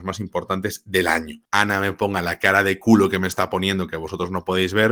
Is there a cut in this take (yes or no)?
yes